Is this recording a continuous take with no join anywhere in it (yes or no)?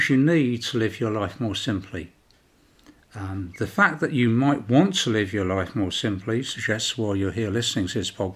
yes